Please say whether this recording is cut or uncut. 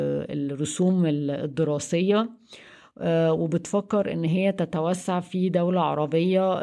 uncut